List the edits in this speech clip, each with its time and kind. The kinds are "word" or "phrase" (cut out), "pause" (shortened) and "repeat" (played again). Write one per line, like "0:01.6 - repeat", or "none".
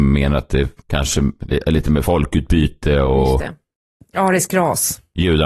none